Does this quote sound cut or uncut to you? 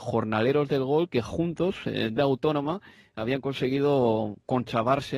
cut